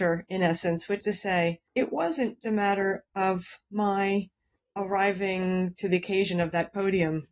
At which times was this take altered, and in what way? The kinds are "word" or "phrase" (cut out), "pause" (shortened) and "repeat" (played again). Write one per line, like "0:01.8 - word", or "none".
0:01.0 - word
0:01.7 - pause
0:02.4 - word
0:04.6 - pause